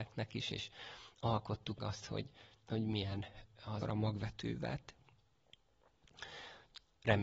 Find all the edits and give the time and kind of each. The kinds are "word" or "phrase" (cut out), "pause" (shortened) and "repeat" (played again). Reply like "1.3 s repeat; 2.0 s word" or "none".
1.8 s word; 3.8 s word